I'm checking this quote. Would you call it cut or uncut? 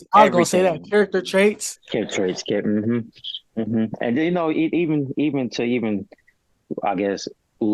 uncut